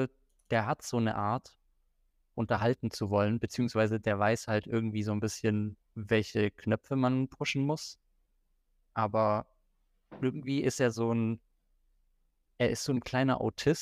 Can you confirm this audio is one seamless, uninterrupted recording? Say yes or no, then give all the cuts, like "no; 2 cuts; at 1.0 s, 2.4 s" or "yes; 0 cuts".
no; 1 cut; at 2.3 s